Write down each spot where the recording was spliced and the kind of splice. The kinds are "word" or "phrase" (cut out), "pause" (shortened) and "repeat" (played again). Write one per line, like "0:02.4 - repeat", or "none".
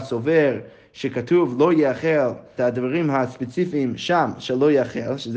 0:02.6 - phrase